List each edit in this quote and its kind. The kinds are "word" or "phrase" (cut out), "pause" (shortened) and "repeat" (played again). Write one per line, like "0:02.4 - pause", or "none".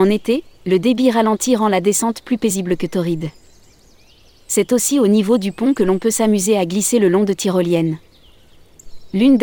none